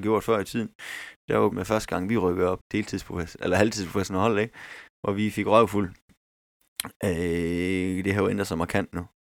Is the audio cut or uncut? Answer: cut